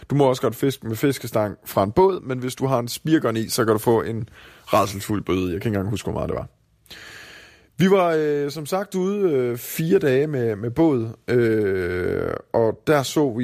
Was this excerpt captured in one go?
yes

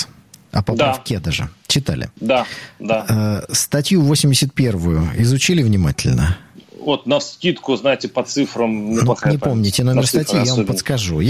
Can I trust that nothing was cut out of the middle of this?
yes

